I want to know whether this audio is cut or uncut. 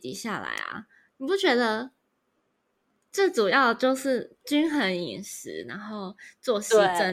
uncut